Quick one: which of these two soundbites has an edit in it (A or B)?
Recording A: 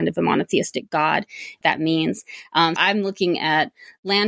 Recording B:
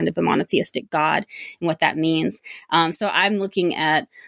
A